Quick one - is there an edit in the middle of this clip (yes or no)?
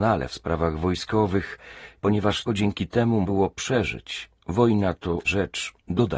yes